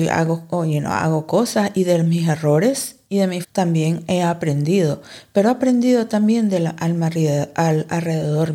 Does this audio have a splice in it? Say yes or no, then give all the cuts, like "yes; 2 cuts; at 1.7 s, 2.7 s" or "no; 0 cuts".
yes; 1 cut; at 3.4 s